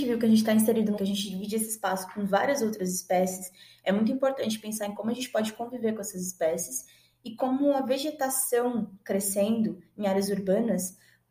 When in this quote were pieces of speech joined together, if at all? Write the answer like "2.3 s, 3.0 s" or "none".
1.0 s